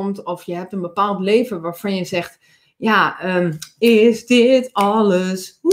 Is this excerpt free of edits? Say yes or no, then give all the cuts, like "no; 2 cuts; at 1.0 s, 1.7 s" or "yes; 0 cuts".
yes; 0 cuts